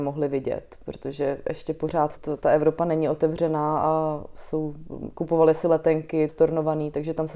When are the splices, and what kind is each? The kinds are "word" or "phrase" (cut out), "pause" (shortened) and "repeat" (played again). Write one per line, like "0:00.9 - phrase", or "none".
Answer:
0:02.2 - word
0:06.3 - phrase